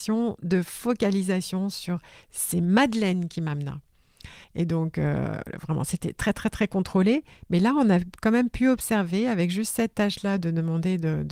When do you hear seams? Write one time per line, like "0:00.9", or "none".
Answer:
0:04.4